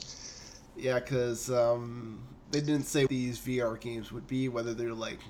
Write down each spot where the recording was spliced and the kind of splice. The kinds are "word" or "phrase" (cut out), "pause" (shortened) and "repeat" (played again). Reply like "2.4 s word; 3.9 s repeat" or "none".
2.4 s pause; 3.1 s word